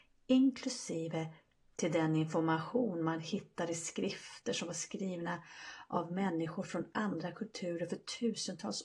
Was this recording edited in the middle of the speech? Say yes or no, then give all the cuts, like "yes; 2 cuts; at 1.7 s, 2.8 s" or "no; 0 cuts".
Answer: no; 0 cuts